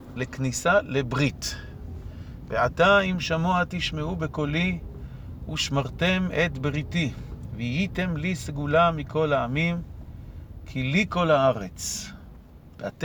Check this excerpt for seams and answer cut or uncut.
uncut